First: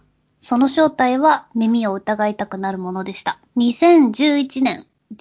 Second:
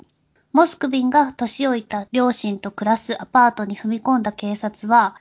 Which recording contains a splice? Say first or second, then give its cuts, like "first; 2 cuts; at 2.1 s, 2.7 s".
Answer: first; 1 cut; at 3.5 s